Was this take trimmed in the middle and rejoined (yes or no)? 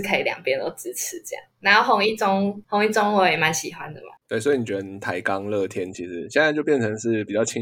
yes